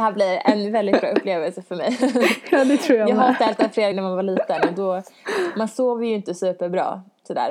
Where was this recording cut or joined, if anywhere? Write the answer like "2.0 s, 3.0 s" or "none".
3.9 s